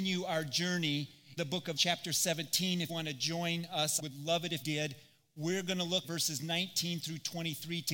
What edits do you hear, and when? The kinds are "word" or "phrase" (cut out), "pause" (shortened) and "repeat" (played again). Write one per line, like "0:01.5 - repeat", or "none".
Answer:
0:01.4 - word
0:01.8 - word
0:02.9 - word
0:04.0 - word
0:04.6 - word
0:06.0 - word